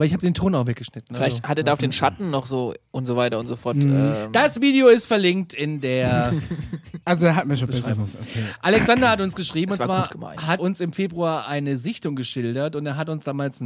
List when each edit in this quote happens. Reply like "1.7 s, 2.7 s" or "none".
7.0 s, 10.6 s